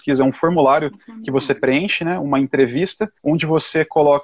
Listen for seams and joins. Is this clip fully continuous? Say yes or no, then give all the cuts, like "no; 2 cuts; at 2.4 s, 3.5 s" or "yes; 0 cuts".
no; 1 cut; at 3.2 s